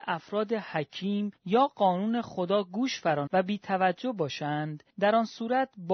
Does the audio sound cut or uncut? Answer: cut